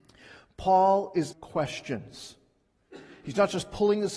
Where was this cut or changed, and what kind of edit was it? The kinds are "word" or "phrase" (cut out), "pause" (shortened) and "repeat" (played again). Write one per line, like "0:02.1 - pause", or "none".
0:01.3 - word